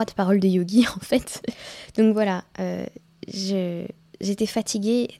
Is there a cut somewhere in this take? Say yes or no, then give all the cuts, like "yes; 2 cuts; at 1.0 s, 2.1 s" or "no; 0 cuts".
no; 0 cuts